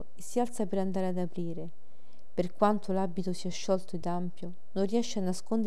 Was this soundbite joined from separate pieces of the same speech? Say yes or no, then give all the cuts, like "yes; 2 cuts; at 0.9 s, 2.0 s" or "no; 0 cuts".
no; 0 cuts